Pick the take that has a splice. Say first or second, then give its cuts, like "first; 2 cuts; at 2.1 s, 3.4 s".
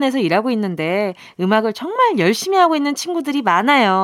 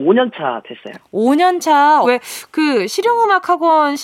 second; 1 cut; at 2.0 s